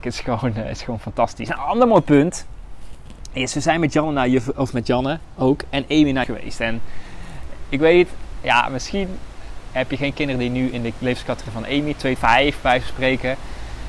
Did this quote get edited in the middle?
yes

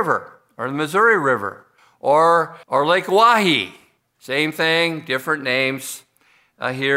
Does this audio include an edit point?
yes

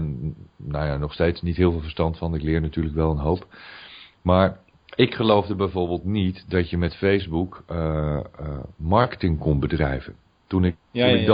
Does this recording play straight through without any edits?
yes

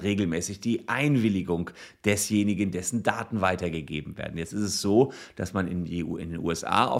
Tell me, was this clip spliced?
no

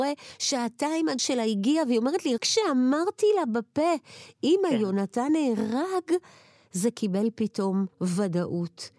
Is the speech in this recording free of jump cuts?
no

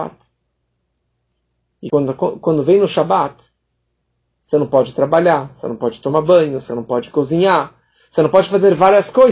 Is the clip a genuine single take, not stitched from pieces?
yes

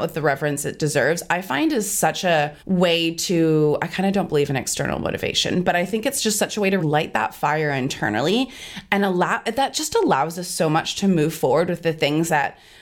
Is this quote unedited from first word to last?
no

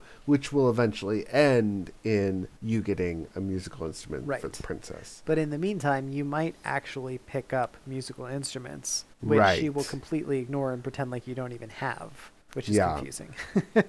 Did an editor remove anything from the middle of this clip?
yes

